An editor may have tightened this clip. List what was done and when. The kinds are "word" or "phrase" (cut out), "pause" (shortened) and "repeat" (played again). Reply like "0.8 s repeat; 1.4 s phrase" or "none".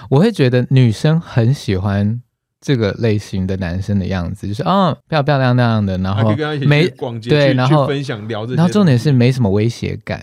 5.0 s pause